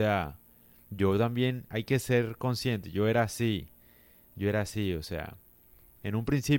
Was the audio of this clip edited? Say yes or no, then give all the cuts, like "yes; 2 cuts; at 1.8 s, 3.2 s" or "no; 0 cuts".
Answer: no; 0 cuts